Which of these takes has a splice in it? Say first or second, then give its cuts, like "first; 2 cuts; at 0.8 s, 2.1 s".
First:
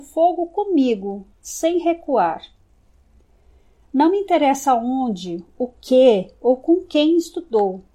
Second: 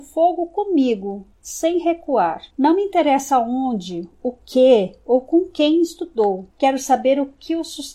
second; 2 cuts; at 2.5 s, 6.5 s